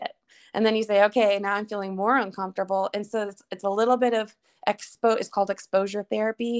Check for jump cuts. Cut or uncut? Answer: uncut